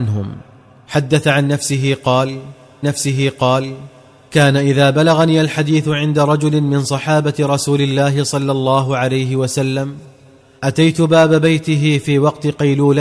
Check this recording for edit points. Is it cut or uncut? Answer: cut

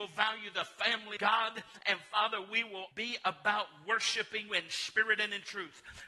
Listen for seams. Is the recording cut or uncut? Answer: cut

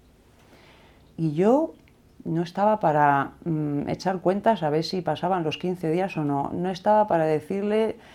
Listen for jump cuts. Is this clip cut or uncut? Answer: uncut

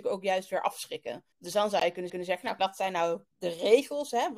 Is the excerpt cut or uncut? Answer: cut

